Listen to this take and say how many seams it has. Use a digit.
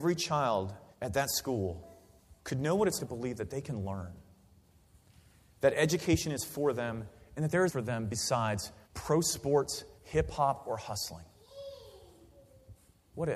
6